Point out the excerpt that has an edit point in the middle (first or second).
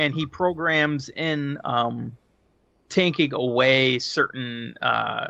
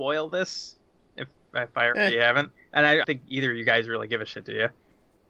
second